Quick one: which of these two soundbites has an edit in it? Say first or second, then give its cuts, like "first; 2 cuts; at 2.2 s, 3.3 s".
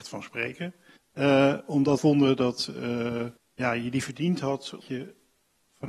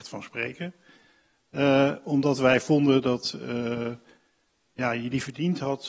first; 4 cuts; at 1.0 s, 2.0 s, 3.4 s, 4.8 s